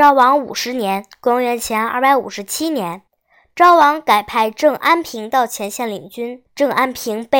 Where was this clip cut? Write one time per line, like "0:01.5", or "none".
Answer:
0:03.1
0:06.5